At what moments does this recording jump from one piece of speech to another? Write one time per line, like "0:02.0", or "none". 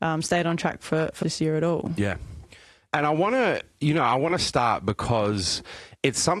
0:01.2